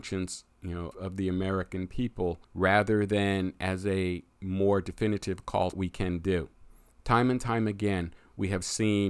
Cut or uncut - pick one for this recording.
cut